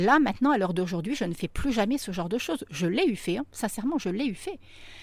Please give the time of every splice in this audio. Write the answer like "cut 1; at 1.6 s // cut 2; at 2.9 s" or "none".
none

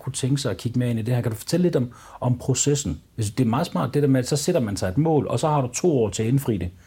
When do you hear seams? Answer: cut 1; at 3.1 s

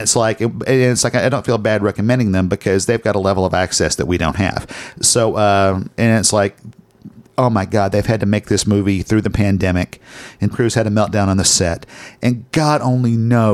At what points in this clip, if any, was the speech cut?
cut 1; at 7.3 s // cut 2; at 10.5 s

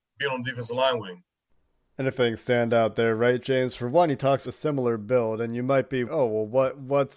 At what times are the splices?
cut 1; at 2.1 s // cut 2; at 4.4 s // cut 3; at 6.1 s

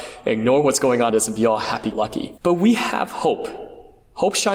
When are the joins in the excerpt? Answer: cut 1; at 1.1 s // cut 2; at 1.9 s // cut 3; at 2.4 s

